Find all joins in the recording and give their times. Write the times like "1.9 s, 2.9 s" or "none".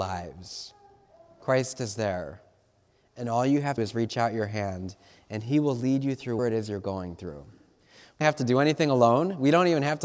3.8 s, 6.4 s, 8.2 s